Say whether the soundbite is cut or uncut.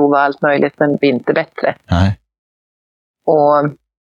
cut